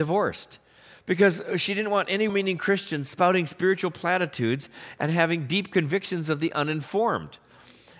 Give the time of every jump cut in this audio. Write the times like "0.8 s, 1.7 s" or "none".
2.3 s